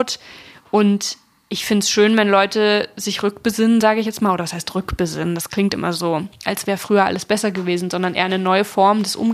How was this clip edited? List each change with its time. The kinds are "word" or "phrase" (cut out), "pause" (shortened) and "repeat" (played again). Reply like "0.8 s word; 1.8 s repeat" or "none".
none